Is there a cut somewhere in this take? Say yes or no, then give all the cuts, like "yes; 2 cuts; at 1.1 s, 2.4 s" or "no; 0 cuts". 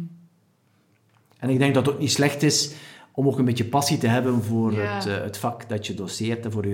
no; 0 cuts